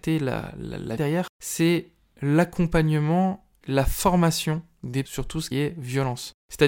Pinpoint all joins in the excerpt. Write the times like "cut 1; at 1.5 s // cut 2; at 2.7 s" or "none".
cut 1; at 1.0 s // cut 2; at 3.6 s // cut 3; at 5.0 s // cut 4; at 5.5 s